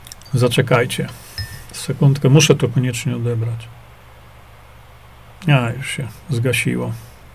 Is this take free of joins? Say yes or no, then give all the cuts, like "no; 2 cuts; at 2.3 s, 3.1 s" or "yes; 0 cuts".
yes; 0 cuts